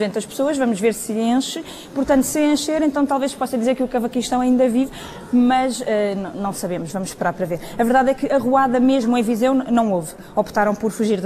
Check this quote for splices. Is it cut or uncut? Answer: uncut